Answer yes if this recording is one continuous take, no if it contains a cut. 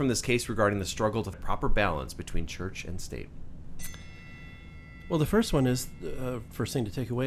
no